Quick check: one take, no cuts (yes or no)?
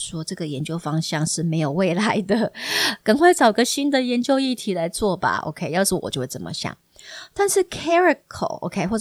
yes